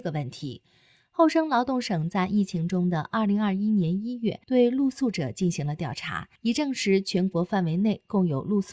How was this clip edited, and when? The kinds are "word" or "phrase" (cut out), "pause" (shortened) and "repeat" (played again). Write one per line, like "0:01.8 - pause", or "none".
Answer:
0:04.4 - pause
0:06.4 - pause